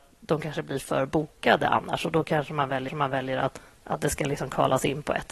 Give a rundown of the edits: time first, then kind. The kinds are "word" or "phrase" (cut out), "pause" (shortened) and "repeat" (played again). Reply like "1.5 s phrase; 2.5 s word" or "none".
2.9 s repeat